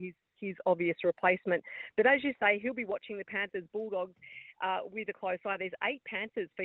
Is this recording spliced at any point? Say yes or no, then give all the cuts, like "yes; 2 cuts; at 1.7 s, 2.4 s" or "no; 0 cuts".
no; 0 cuts